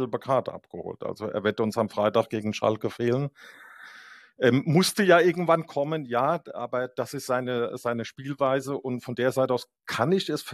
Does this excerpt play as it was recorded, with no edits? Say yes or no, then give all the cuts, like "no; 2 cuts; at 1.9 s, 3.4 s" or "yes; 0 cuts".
yes; 0 cuts